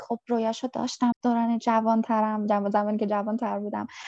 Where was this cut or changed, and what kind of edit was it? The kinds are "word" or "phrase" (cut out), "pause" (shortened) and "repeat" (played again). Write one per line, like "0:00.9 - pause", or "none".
0:01.1 - word